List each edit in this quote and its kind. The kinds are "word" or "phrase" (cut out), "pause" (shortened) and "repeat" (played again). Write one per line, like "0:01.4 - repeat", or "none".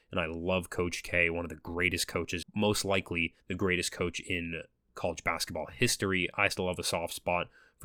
0:02.4 - phrase
0:03.4 - pause